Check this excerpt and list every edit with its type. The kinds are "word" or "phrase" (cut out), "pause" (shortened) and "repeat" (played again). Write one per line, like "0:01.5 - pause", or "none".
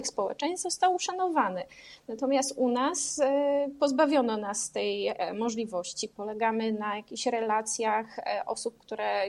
none